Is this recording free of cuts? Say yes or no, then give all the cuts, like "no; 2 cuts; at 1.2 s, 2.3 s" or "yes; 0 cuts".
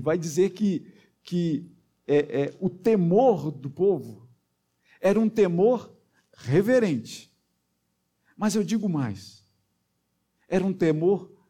yes; 0 cuts